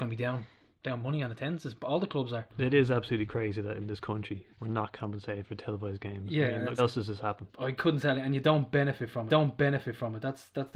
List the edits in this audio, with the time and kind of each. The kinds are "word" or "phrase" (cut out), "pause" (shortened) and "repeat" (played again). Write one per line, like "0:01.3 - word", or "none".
0:02.5 - pause
0:04.5 - pause
0:06.8 - word
0:07.5 - pause
0:09.3 - repeat